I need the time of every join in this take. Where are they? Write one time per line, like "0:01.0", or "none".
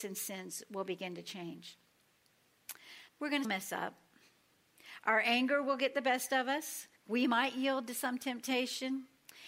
0:03.1
0:03.4
0:07.0

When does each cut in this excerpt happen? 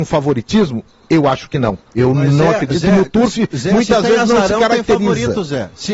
0:01.9

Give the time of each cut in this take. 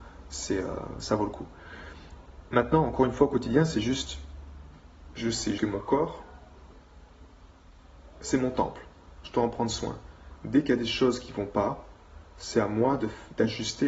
0:05.6

